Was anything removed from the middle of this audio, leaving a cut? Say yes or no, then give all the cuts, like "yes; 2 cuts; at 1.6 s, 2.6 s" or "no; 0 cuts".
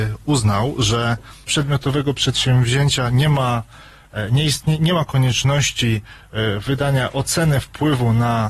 yes; 1 cut; at 1.5 s